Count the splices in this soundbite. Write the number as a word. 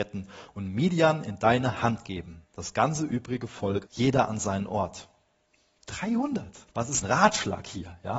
four